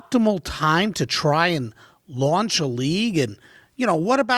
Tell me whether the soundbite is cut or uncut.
uncut